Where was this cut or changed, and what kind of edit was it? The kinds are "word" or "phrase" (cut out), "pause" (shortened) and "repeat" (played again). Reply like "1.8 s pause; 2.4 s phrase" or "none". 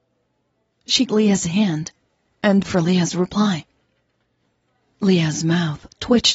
1.1 s word; 2.6 s word